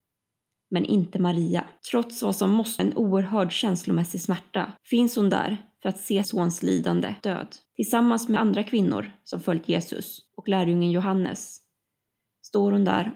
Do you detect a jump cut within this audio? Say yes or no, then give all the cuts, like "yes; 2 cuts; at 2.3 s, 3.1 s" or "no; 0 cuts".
yes; 8 cuts; at 1.8 s, 2.8 s, 4.8 s, 6.2 s, 7.2 s, 7.7 s, 8.4 s, 10.3 s